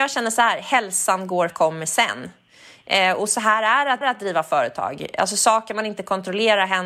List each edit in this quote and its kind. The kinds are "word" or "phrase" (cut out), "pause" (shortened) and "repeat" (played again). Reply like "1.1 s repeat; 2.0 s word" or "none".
1.5 s phrase; 4.0 s repeat